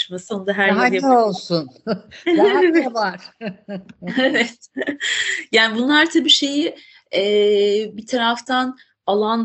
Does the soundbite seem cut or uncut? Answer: uncut